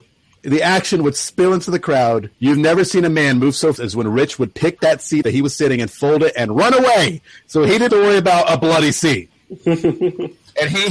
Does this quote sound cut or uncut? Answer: cut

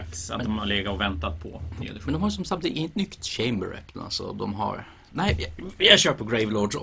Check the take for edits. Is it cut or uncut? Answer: cut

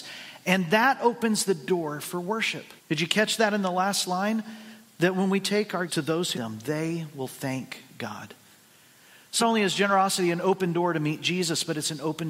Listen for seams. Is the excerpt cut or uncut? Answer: cut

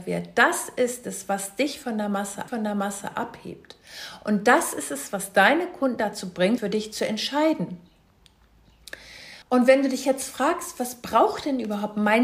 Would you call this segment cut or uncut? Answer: cut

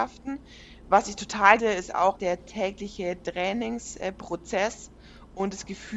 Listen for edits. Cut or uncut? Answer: cut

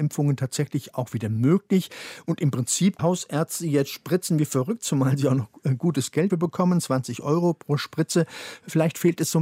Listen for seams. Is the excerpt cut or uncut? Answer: cut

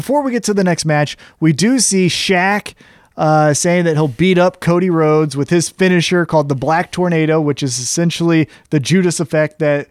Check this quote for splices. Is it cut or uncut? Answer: uncut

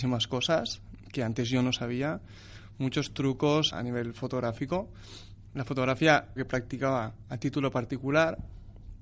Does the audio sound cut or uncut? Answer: cut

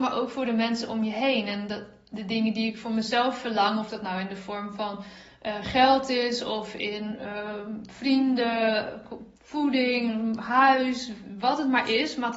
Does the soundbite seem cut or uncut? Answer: cut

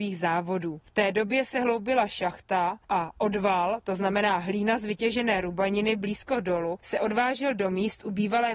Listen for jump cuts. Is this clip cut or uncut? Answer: uncut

